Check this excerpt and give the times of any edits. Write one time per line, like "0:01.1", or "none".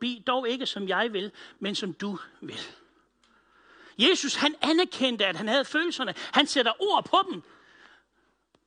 none